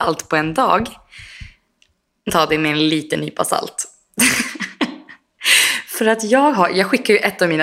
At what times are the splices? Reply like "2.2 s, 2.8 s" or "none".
2.3 s